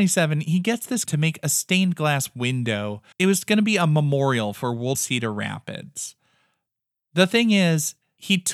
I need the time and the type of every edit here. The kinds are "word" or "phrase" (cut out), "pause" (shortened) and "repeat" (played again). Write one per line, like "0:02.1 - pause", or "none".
0:01.1 - word
0:03.1 - pause
0:04.9 - phrase